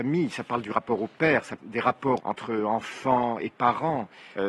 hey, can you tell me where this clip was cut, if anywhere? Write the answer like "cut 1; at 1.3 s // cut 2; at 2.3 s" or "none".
cut 1; at 1.6 s // cut 2; at 2.2 s